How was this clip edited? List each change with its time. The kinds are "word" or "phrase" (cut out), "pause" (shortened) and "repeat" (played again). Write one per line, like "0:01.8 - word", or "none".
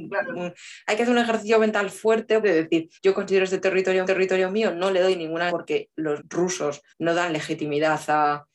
0:02.4 - phrase
0:03.0 - pause
0:04.0 - repeat
0:05.5 - word
0:06.2 - word
0:06.9 - pause